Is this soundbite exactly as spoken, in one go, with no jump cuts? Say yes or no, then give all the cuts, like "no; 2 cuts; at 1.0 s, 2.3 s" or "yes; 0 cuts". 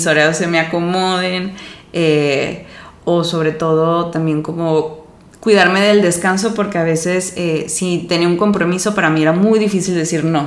yes; 0 cuts